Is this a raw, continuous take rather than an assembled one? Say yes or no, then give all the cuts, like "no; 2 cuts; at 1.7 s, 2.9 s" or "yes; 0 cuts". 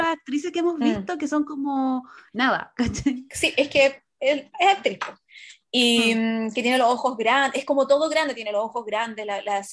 yes; 0 cuts